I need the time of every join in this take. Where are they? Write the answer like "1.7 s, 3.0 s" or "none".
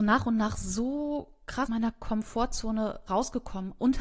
1.7 s